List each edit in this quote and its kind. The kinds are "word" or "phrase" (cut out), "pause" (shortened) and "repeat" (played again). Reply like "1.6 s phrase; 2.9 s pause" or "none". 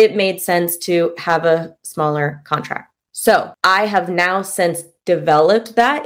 none